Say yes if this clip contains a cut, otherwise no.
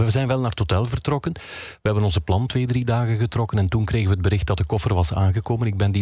no